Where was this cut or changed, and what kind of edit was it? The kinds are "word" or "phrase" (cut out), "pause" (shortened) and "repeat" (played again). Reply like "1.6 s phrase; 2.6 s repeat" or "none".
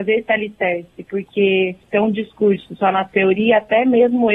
none

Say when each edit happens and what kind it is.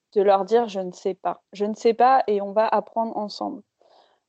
1.5 s pause

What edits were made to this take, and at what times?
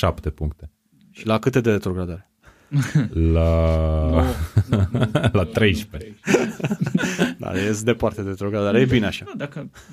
none

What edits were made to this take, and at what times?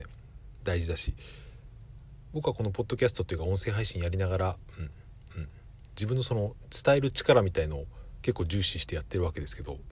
5.3 s repeat

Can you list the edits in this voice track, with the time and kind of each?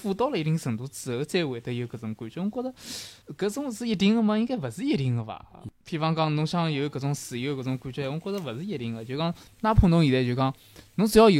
3.2 s pause

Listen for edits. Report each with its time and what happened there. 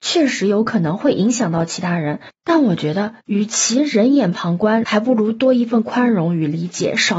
4.8 s phrase

